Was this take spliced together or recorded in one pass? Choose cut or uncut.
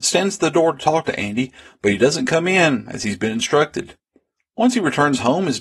uncut